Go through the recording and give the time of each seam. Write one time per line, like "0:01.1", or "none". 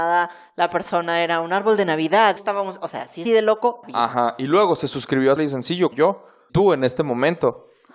0:02.4
0:03.2
0:03.8
0:05.4
0:05.9
0:06.5